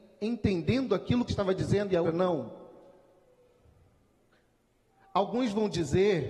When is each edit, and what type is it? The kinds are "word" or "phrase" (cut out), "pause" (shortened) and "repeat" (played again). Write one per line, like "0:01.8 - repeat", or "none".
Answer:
0:01.3 - word
0:02.0 - word